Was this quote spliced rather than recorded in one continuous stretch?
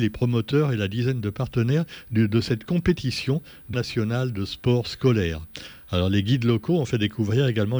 yes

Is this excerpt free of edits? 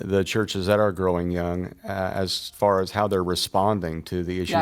yes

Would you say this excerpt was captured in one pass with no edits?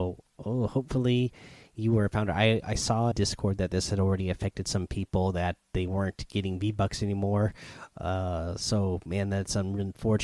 no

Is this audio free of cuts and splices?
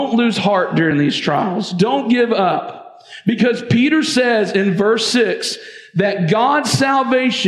yes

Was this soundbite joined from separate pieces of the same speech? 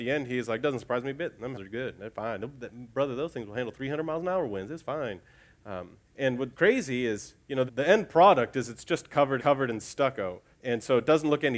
yes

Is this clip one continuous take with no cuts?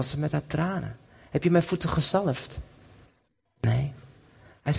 yes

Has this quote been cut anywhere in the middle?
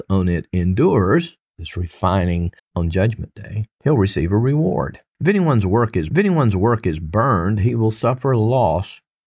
yes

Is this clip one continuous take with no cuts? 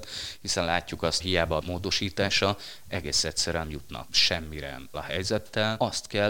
no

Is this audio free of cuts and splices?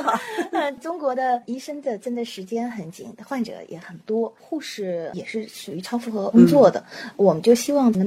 no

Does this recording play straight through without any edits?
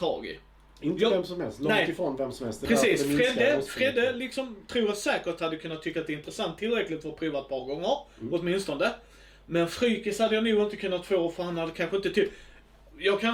yes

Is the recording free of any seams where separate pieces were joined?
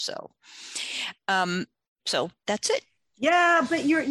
yes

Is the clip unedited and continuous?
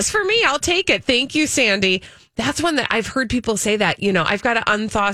yes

